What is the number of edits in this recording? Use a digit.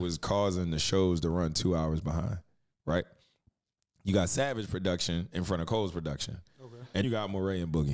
1